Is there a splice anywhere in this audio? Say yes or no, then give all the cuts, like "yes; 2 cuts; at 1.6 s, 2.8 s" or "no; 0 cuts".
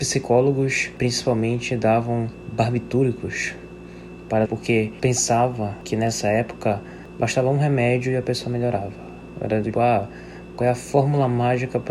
yes; 2 cuts; at 4.4 s, 9.7 s